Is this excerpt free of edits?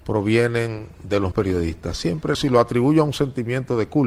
no; 2 cuts; at 1.3 s, 2.3 s

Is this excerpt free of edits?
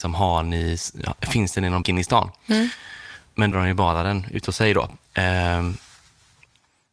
no; 3 cuts; at 1.8 s, 3.5 s, 5.0 s

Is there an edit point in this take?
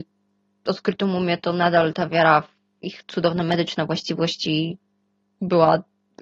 no; 0 cuts

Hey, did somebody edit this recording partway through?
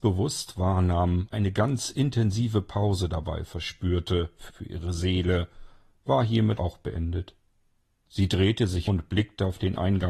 yes; 4 cuts; at 1.3 s, 4.5 s, 6.6 s, 8.9 s

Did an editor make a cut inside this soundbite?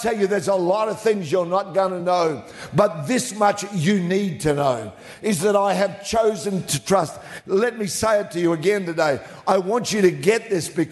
no; 0 cuts

